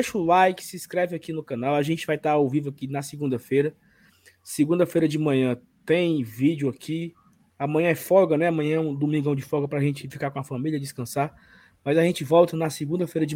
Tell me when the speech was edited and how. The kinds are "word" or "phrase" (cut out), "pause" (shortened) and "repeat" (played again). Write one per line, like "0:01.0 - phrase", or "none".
none